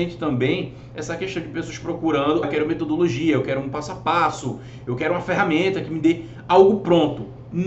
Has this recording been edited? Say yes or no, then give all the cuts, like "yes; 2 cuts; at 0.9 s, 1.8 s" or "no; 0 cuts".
yes; 1 cut; at 2.4 s